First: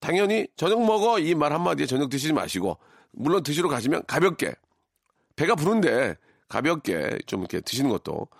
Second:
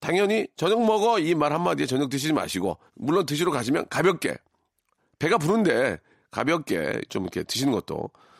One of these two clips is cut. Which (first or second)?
second